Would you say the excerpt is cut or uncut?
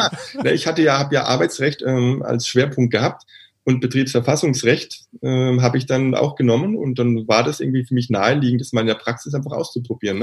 uncut